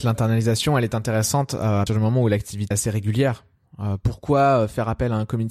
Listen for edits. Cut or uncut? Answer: cut